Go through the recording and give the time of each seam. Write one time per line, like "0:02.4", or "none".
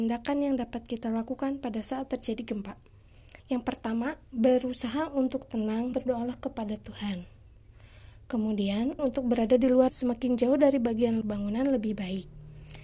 0:03.4
0:05.9
0:09.0
0:09.9
0:11.2